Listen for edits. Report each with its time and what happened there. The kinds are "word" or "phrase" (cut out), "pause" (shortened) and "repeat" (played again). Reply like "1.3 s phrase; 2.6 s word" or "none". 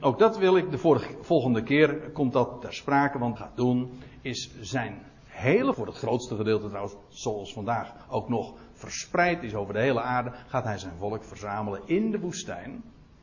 3.4 s phrase; 5.7 s phrase